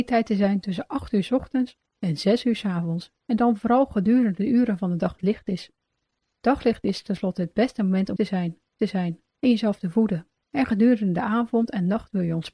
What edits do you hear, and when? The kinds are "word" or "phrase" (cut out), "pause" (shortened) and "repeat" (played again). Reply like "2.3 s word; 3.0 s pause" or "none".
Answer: 3.2 s pause; 5.2 s phrase; 8.2 s word; 8.8 s repeat